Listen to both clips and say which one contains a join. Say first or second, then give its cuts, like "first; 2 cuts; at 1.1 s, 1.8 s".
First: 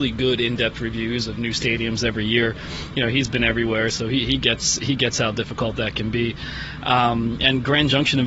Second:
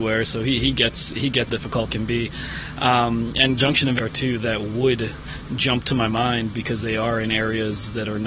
second; 4 cuts; at 1.5 s, 1.9 s, 3.6 s, 4.0 s